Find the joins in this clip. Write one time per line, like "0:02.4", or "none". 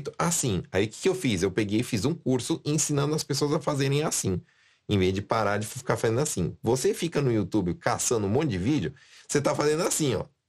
none